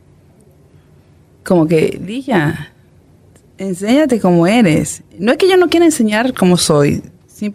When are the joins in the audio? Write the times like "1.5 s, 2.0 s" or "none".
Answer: 3.0 s